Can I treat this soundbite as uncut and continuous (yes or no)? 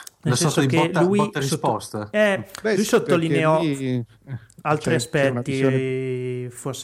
yes